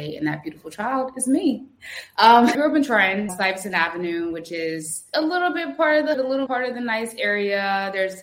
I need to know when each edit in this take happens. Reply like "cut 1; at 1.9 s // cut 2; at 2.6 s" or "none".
cut 1; at 2.5 s // cut 2; at 3.3 s // cut 3; at 5.1 s // cut 4; at 6.1 s // cut 5; at 6.5 s